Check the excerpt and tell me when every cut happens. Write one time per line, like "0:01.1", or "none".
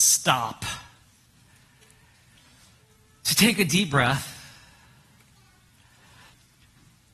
none